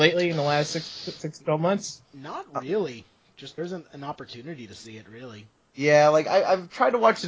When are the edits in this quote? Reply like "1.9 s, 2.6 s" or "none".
2.0 s, 3.6 s